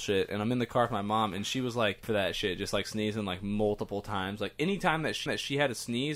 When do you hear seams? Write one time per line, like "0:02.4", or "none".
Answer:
0:02.0
0:05.3